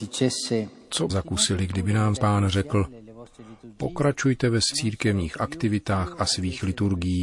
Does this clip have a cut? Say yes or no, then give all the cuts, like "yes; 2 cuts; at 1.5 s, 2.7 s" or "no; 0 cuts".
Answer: yes; 3 cuts; at 1.1 s, 2.2 s, 4.7 s